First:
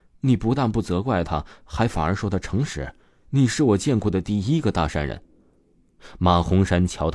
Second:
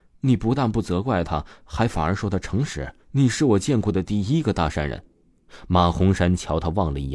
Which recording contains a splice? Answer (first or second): second